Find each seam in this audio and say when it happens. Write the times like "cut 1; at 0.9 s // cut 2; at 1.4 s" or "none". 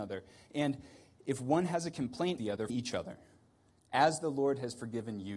cut 1; at 2.4 s // cut 2; at 2.7 s